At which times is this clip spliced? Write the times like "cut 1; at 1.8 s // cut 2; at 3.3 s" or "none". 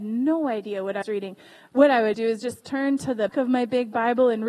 cut 1; at 1.0 s // cut 2; at 2.1 s // cut 3; at 3.3 s